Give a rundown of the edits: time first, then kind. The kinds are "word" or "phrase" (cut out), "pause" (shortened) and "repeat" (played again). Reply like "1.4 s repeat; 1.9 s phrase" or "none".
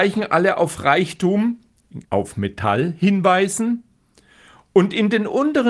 2.0 s pause